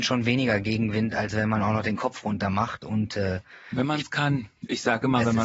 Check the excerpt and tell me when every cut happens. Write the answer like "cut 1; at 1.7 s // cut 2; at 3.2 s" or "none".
none

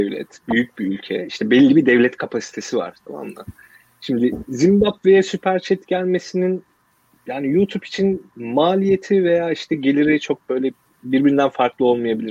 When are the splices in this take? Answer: none

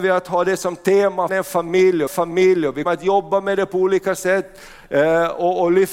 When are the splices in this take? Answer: cut 1; at 1.3 s // cut 2; at 2.1 s // cut 3; at 2.8 s

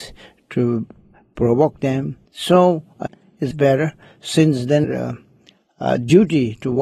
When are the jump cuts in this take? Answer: cut 1; at 2.3 s // cut 2; at 3.1 s // cut 3; at 3.5 s // cut 4; at 4.8 s

